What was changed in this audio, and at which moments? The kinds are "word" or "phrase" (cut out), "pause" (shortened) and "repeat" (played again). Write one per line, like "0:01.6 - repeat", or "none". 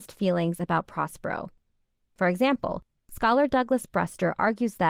none